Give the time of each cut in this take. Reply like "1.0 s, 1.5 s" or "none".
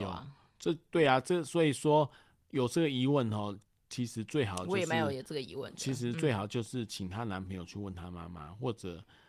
none